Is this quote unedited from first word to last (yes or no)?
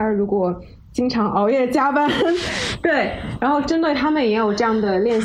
yes